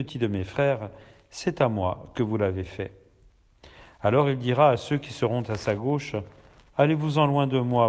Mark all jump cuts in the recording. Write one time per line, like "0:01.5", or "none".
none